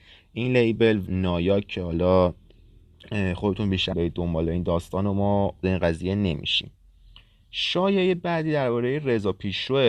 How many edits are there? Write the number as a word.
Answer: three